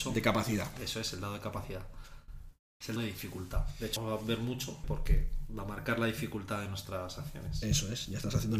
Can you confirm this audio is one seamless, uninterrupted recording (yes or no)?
no